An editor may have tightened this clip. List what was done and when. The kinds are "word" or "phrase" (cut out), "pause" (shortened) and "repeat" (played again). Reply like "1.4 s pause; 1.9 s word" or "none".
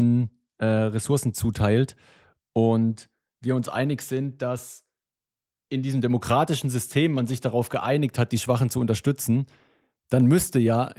none